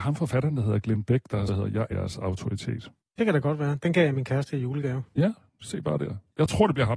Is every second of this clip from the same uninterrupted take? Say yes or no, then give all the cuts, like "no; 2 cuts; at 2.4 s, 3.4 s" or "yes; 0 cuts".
no; 3 cuts; at 1.5 s, 1.9 s, 3.0 s